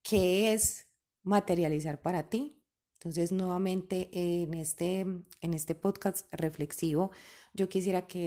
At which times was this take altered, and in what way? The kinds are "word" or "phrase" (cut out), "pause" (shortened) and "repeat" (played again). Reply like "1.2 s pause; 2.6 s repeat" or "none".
none